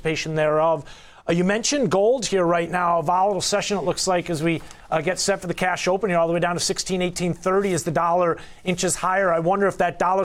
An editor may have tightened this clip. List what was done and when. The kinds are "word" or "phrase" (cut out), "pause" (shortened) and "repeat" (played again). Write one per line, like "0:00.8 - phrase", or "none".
none